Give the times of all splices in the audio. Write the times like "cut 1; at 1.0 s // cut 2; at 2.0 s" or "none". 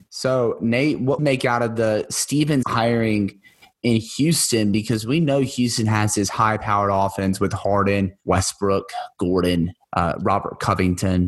cut 1; at 1.2 s // cut 2; at 2.6 s // cut 3; at 8.2 s // cut 4; at 9.8 s